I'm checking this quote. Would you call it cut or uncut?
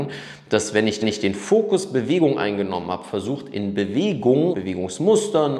cut